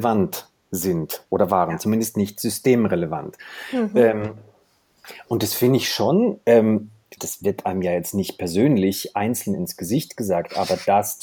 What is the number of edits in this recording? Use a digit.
1